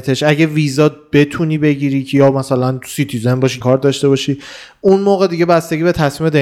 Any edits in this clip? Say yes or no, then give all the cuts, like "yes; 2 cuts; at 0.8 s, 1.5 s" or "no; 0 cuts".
yes; 1 cut; at 3.6 s